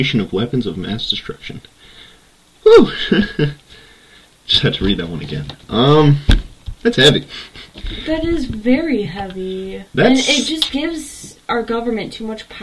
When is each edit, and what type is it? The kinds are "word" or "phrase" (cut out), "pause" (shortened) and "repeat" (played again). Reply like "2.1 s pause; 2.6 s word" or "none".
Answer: none